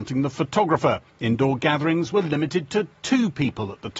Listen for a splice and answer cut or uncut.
cut